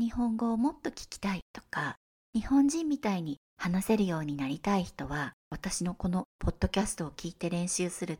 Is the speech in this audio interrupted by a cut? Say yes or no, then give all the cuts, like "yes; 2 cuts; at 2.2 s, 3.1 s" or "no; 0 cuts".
yes; 1 cut; at 5.4 s